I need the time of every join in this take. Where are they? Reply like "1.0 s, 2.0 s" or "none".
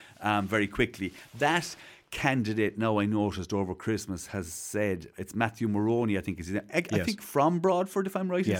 none